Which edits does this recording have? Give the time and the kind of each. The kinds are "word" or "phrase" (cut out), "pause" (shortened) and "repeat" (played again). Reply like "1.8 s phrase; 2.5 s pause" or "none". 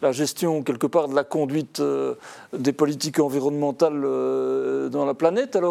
none